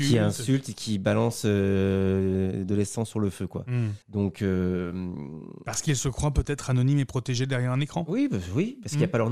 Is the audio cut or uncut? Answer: cut